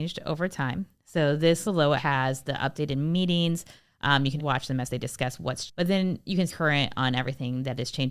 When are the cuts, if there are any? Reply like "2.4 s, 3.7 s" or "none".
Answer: 1.6 s, 2.0 s, 4.4 s, 5.7 s, 6.5 s